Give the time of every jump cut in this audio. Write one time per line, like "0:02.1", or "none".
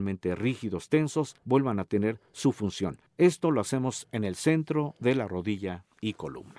0:01.4
0:03.1